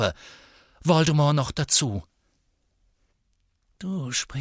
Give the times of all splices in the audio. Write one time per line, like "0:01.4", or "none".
none